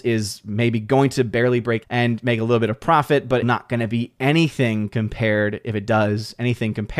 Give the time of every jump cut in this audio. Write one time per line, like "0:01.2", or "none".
0:01.8
0:03.4